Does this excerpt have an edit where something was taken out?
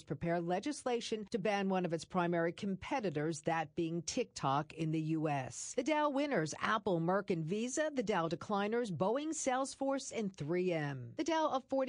no; 0 cuts

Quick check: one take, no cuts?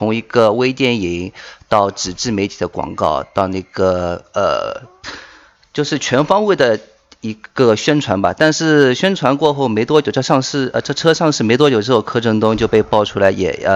yes; 0 cuts

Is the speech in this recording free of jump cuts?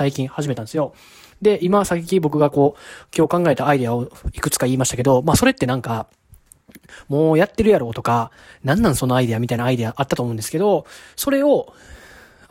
yes; 0 cuts

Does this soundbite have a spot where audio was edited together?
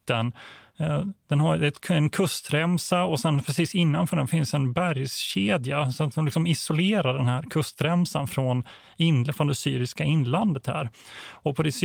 no; 0 cuts

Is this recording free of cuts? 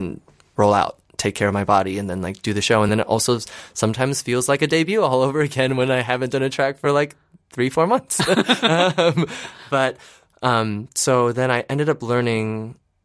yes; 0 cuts

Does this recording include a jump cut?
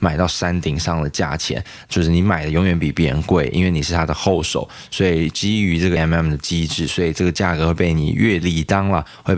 yes; 1 cut; at 6.0 s

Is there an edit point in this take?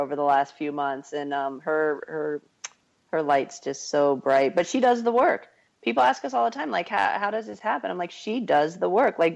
no; 0 cuts

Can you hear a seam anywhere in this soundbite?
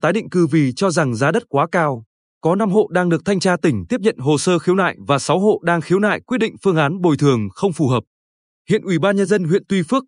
no; 0 cuts

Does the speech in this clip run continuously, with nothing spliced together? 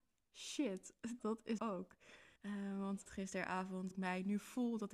no; 5 cuts; at 1.2 s, 1.6 s, 2.4 s, 3.1 s, 3.9 s

